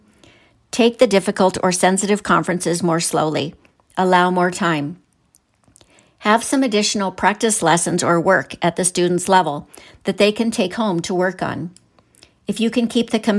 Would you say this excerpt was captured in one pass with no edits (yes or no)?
yes